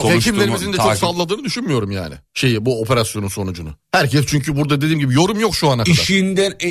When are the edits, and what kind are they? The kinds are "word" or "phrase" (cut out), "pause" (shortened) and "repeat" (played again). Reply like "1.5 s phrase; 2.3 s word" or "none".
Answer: 2.3 s pause; 3.8 s pause